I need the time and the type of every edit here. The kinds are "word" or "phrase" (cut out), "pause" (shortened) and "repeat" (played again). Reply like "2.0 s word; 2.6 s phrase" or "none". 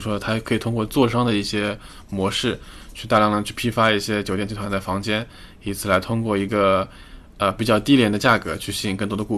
none